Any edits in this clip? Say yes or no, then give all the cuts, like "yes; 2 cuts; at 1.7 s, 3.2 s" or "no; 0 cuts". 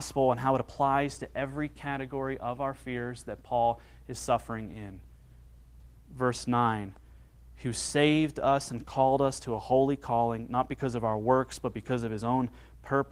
no; 0 cuts